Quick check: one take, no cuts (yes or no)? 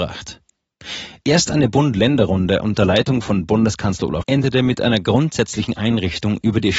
no